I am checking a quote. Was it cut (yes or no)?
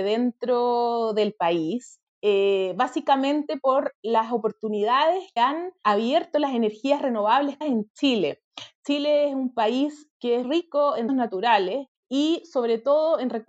yes